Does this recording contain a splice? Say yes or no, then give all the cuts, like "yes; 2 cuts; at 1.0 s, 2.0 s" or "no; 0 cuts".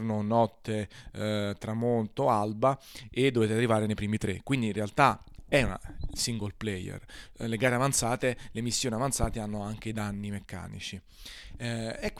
no; 0 cuts